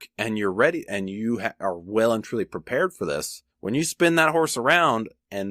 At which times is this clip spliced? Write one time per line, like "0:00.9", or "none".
0:03.5